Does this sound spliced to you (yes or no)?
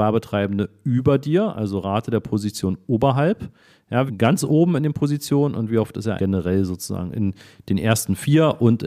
yes